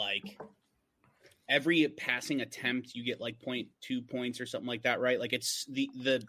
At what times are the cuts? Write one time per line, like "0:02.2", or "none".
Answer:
none